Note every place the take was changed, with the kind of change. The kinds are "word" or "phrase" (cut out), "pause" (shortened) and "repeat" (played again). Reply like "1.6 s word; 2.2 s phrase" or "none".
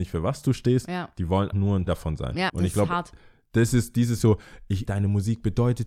1.5 s word; 1.9 s word; 2.5 s word; 4.2 s word; 4.9 s word